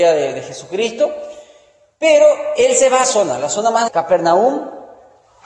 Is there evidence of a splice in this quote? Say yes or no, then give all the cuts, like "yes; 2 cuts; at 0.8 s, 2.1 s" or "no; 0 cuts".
yes; 2 cuts; at 3.0 s, 3.9 s